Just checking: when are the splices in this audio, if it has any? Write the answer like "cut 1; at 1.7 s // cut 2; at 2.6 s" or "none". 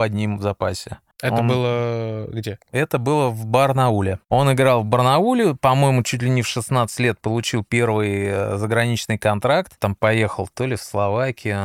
cut 1; at 9.8 s